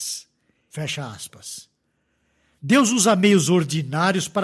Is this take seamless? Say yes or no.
yes